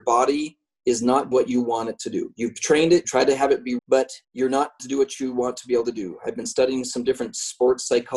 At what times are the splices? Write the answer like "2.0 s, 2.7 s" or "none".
1.3 s, 3.0 s, 3.8 s, 4.2 s, 4.8 s